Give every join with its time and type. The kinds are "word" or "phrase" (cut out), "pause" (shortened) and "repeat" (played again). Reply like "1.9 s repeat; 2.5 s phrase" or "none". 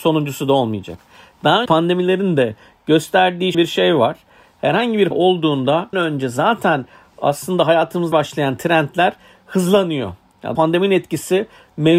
1.7 s word; 3.5 s word; 5.1 s word; 5.9 s word; 8.1 s word; 10.5 s word